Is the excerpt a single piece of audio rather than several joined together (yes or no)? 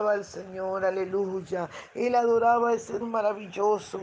no